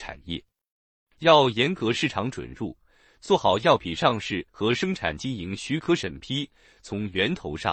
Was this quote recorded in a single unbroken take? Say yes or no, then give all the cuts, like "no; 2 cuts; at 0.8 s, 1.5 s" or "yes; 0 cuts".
no; 1 cut; at 4.5 s